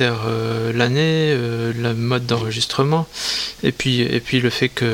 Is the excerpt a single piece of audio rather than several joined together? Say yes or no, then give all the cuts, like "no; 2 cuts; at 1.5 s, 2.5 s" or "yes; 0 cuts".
yes; 0 cuts